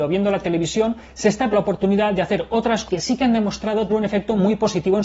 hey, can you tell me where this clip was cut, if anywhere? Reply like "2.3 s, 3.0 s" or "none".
1.5 s, 2.9 s, 3.9 s